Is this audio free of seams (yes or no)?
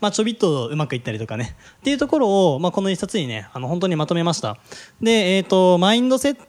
yes